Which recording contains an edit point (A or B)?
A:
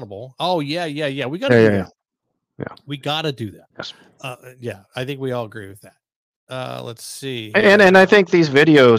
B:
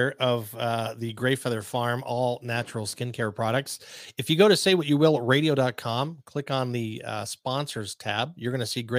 A